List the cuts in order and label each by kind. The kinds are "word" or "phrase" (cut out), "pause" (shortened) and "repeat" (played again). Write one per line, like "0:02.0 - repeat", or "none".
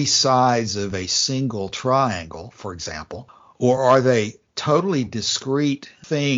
none